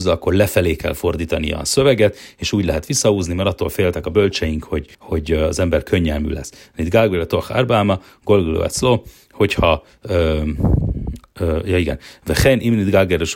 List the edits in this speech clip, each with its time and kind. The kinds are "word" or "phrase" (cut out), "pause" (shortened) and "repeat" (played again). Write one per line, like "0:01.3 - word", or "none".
0:04.9 - pause